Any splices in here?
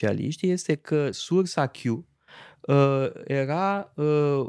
no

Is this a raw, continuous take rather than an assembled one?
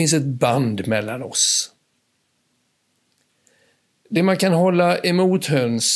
yes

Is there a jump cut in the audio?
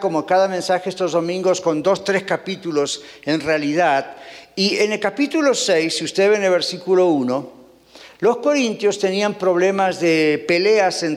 no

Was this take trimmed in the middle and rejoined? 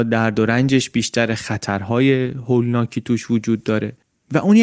no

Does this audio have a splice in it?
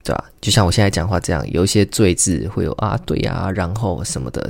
no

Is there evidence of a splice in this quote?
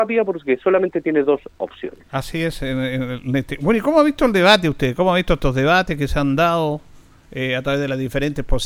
no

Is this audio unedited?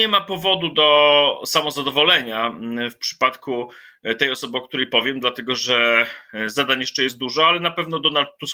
yes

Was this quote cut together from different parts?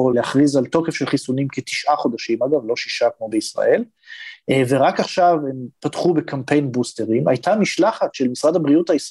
no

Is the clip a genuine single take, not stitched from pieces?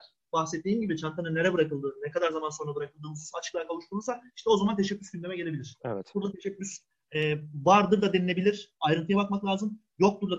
yes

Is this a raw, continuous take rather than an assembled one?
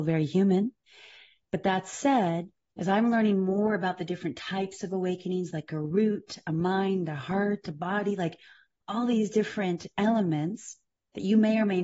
yes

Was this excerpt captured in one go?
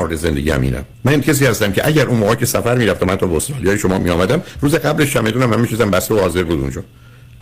no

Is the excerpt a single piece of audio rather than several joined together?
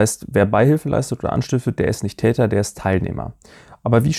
yes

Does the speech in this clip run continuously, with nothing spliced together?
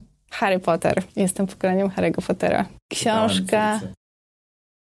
no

